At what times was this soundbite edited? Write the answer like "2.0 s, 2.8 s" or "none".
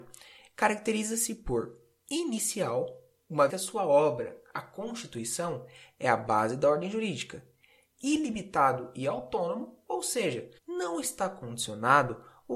3.5 s, 10.6 s